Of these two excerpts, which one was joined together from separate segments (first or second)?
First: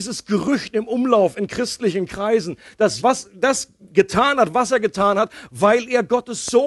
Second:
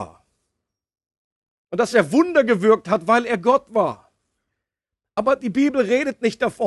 first